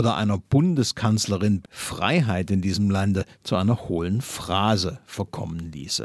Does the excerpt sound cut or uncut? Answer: cut